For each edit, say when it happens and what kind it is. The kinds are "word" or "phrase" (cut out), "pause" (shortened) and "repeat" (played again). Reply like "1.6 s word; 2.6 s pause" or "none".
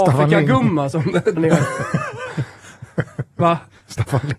1.4 s word